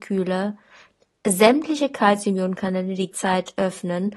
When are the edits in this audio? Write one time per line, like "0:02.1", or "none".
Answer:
0:03.1